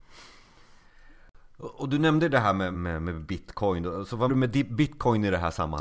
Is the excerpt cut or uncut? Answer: cut